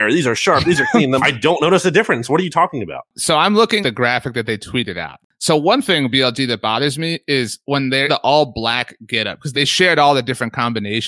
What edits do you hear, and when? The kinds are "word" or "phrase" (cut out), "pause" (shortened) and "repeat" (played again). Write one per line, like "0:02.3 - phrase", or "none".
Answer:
0:01.2 - word
0:03.8 - word
0:08.1 - word
0:09.5 - word